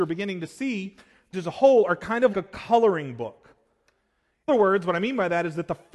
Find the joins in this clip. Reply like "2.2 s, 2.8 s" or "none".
1.3 s, 2.3 s, 4.5 s